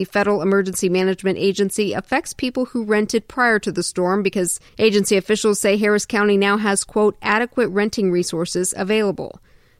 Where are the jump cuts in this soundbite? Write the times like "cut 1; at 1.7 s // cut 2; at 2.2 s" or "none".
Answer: cut 1; at 4.7 s